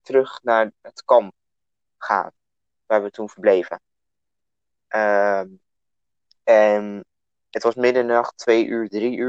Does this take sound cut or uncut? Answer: uncut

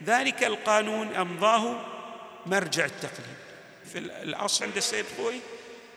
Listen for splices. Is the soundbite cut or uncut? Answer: cut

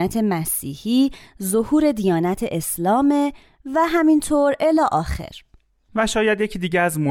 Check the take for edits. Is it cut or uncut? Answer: uncut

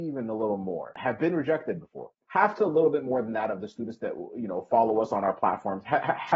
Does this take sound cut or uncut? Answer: cut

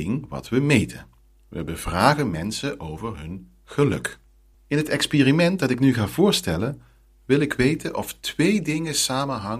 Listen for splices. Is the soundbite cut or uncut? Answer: uncut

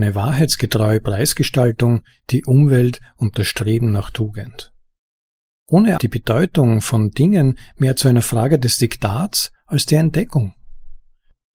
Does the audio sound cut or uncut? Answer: cut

